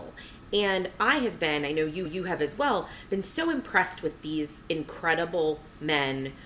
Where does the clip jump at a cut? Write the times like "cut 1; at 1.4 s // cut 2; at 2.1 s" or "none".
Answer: cut 1; at 2.1 s